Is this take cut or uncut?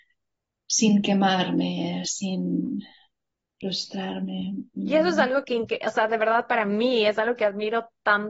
uncut